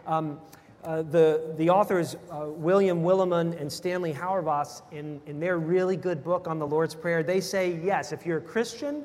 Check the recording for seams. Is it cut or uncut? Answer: uncut